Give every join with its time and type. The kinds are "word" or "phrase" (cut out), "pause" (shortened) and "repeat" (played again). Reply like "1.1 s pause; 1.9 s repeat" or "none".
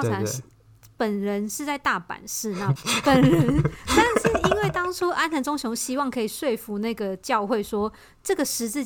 2.8 s phrase